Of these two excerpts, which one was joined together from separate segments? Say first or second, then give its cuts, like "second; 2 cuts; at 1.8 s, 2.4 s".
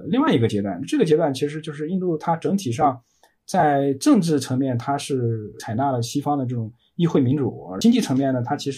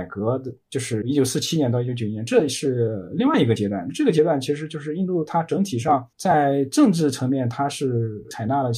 second; 1 cut; at 6.1 s